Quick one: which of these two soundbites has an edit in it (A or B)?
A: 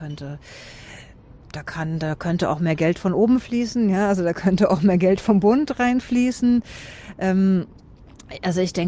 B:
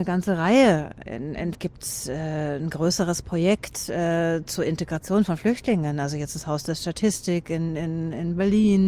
B